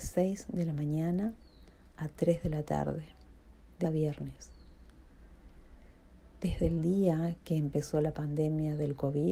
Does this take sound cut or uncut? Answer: cut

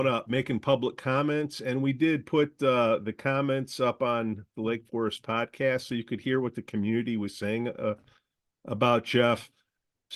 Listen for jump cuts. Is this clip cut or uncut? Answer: uncut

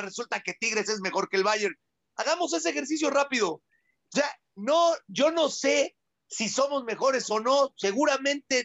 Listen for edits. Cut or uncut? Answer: uncut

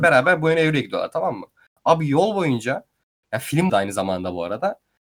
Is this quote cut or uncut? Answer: cut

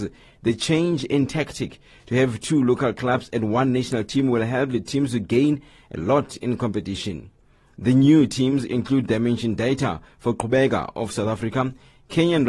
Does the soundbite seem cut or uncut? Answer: uncut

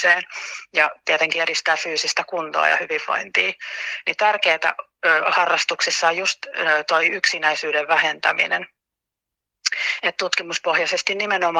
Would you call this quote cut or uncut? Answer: uncut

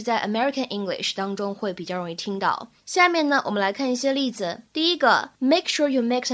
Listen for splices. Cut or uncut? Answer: cut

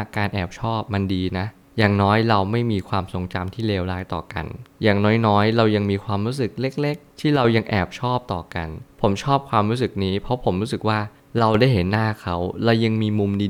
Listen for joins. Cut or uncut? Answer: uncut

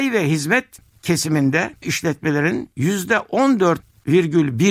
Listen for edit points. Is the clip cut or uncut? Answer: cut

